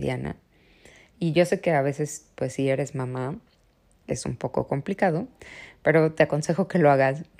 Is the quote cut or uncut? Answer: uncut